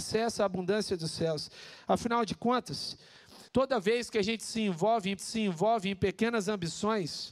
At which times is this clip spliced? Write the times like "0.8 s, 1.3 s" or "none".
3.5 s, 5.2 s